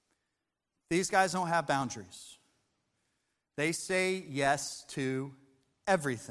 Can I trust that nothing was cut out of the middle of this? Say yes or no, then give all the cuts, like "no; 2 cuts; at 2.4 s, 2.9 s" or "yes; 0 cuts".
yes; 0 cuts